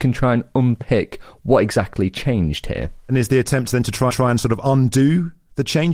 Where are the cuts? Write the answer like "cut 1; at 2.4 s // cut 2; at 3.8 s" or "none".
cut 1; at 4.1 s